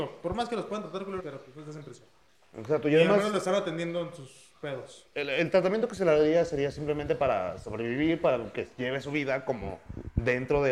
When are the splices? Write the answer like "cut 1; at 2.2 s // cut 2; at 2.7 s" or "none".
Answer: cut 1; at 1.2 s

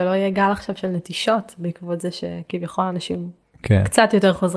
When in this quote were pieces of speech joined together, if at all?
cut 1; at 3.4 s

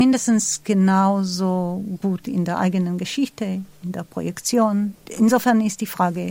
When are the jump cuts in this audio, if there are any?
none

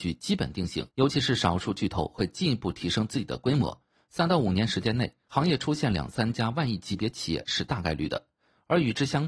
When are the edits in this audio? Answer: cut 1; at 0.9 s

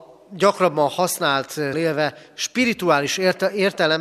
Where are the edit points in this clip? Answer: cut 1; at 1.7 s

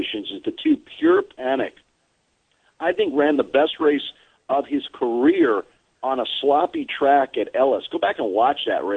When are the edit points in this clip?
none

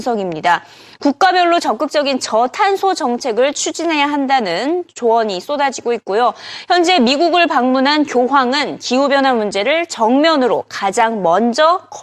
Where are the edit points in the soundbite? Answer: none

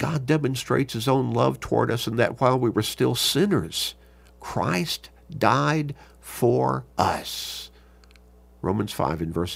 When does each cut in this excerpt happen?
cut 1; at 6.9 s

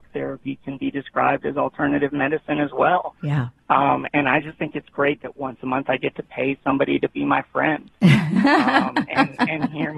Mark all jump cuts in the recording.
none

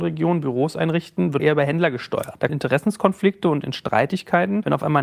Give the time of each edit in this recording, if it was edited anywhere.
cut 1; at 1.4 s // cut 2; at 2.5 s

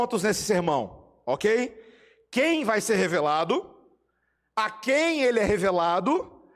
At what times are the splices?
none

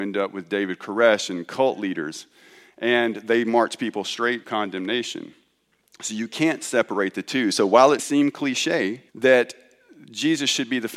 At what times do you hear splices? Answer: cut 1; at 4.4 s // cut 2; at 8.0 s // cut 3; at 9.1 s

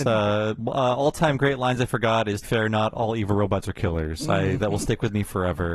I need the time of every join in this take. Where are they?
cut 1; at 2.4 s

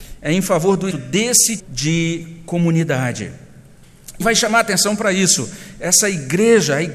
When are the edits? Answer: cut 1; at 0.9 s // cut 2; at 1.6 s // cut 3; at 4.2 s

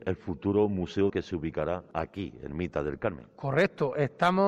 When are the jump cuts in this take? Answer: cut 1; at 1.1 s // cut 2; at 2.5 s

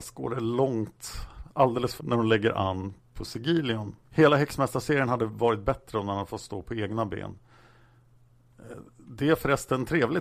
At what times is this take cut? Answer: cut 1; at 2.0 s // cut 2; at 4.0 s

